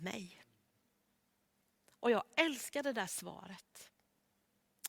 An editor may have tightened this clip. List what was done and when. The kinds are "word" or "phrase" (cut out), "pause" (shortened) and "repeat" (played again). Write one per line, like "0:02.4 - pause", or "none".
none